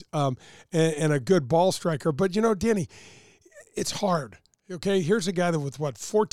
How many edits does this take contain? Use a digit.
0